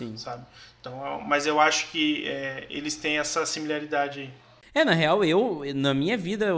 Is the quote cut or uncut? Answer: uncut